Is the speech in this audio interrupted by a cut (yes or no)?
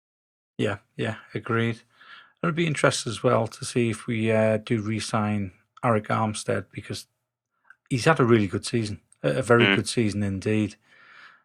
no